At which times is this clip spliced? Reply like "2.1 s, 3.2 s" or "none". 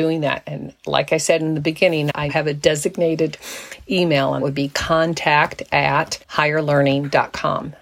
2.3 s, 4.4 s, 6.2 s